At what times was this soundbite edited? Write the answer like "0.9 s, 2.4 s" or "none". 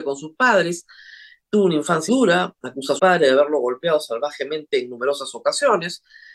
2.1 s, 3.0 s